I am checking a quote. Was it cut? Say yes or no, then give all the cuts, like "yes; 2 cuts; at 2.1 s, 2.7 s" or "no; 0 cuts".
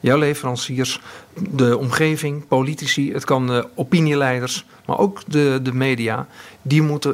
no; 0 cuts